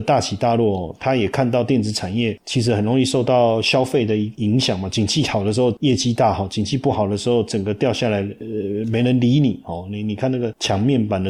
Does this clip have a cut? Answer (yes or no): no